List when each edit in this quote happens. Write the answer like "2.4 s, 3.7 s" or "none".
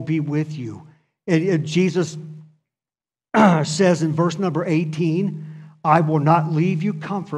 none